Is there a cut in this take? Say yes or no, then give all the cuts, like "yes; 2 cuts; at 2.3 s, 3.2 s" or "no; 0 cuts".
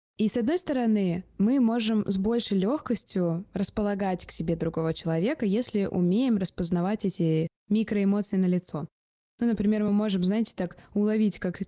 no; 0 cuts